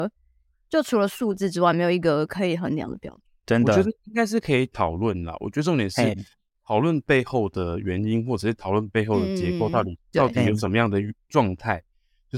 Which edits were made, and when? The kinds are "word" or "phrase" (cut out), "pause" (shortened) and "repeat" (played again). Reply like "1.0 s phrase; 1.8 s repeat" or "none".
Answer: 3.3 s pause; 10.0 s pause